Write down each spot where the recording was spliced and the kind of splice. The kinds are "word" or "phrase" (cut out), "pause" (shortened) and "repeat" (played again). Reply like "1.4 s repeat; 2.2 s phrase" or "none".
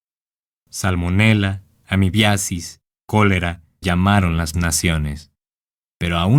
3.8 s word; 4.5 s word